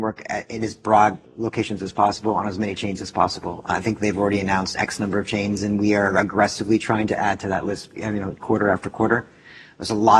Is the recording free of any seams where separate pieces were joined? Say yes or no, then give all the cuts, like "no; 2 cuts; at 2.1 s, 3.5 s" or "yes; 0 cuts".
no; 1 cut; at 4.7 s